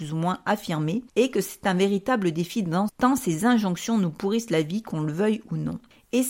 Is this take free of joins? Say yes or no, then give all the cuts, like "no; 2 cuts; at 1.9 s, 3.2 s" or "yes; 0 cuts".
no; 2 cuts; at 1.1 s, 2.9 s